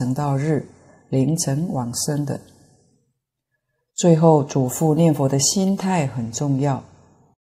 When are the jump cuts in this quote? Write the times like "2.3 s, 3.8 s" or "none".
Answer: none